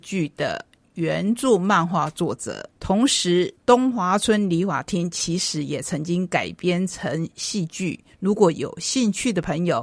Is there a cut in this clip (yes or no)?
yes